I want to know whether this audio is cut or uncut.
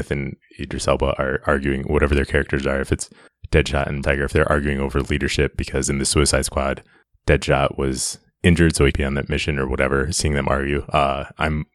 cut